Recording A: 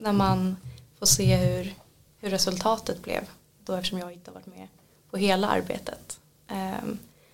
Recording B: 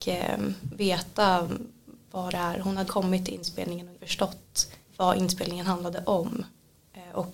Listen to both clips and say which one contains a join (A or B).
B